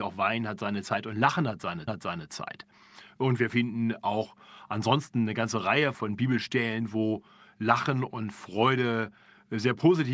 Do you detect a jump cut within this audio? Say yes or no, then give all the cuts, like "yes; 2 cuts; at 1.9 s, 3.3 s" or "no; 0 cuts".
yes; 2 cuts; at 1.9 s, 5.9 s